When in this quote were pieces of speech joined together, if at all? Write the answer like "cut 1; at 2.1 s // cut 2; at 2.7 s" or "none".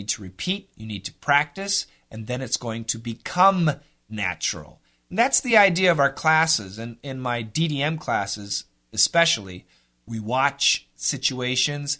none